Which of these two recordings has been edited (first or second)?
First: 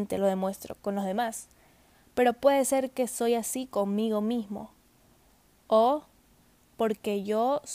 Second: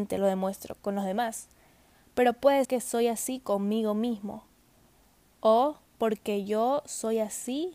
second